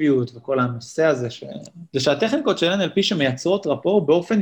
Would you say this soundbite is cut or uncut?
cut